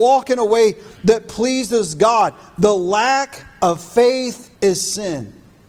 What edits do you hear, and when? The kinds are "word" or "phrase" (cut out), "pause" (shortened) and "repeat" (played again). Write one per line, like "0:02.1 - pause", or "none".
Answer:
0:04.6 - pause